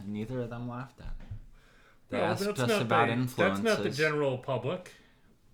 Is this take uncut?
yes; 0 cuts

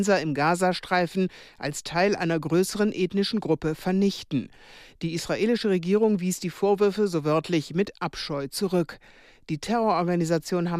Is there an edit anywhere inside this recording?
no; 0 cuts

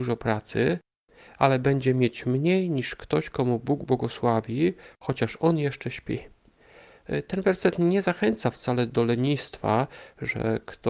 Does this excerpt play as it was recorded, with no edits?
yes; 0 cuts

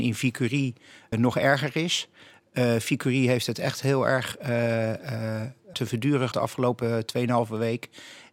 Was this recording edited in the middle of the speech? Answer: yes; 3 cuts; at 1.1 s, 5.7 s, 6.3 s

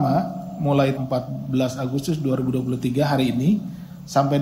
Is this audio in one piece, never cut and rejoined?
no; 1 cut; at 1.0 s

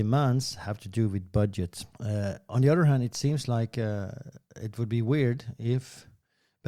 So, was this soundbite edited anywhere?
yes; 1 cut; at 1.9 s

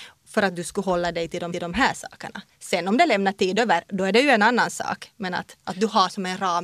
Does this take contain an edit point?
yes; 2 cuts; at 1.5 s, 5.6 s

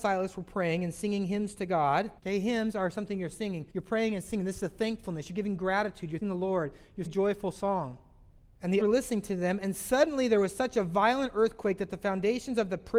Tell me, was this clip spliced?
yes; 6 cuts; at 2.2 s, 3.7 s, 6.2 s, 7.1 s, 8.4 s, 8.8 s

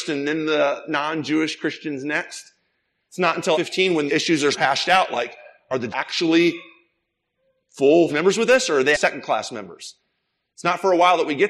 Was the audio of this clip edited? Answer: yes; 6 cuts; at 3.5 s, 4.1 s, 4.5 s, 5.9 s, 8.1 s, 8.9 s

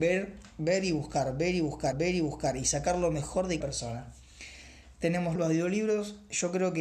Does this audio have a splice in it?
yes; 3 cuts; at 1.9 s, 3.6 s, 5.4 s

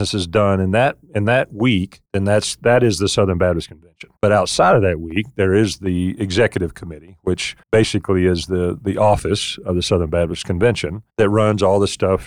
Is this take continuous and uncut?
no; 4 cuts; at 2.1 s, 4.2 s, 7.6 s, 11.1 s

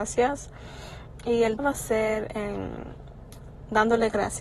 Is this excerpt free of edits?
no; 1 cut; at 1.6 s

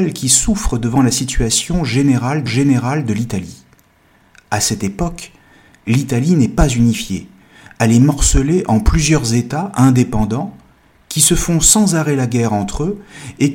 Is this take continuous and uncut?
no; 1 cut; at 2.5 s

